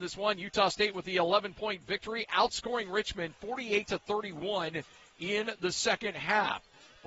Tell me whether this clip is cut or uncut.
uncut